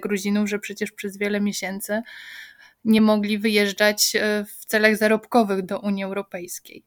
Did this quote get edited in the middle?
no; 0 cuts

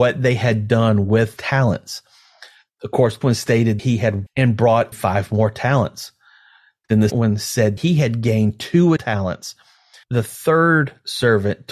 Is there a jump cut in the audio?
yes; 9 cuts; at 1.4 s, 3.2 s, 3.8 s, 4.3 s, 4.9 s, 7.1 s, 7.8 s, 9.0 s, 10.0 s

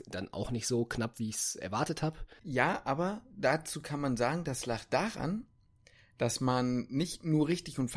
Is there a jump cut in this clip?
no; 0 cuts

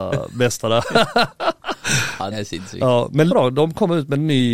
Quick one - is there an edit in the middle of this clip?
yes; 2 cuts; at 2.3 s, 3.3 s

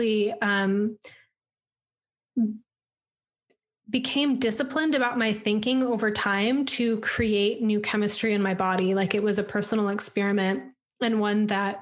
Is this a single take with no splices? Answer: yes; 0 cuts

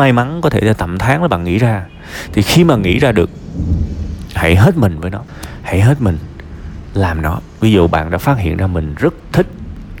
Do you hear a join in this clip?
no; 0 cuts

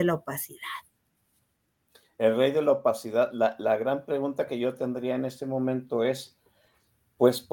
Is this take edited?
no; 0 cuts

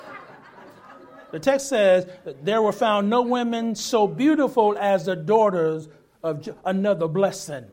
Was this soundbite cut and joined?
no; 0 cuts

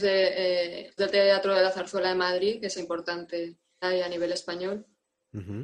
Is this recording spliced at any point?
yes; 3 cuts; at 1.0 s, 2.8 s, 3.8 s

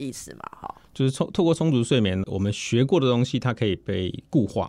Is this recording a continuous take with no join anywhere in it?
no; 1 cut; at 2.2 s

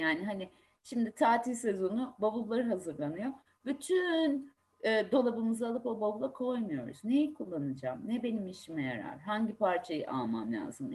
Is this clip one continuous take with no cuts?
yes; 0 cuts

